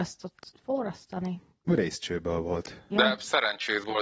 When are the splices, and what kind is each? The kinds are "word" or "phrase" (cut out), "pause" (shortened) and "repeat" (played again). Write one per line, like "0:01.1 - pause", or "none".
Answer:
none